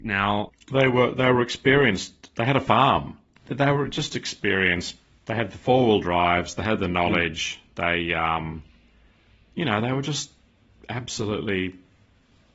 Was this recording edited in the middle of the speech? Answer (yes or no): no